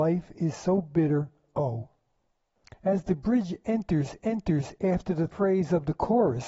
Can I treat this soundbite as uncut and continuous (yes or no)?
no